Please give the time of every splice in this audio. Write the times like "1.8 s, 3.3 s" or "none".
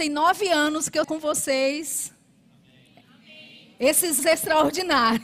1.0 s, 4.2 s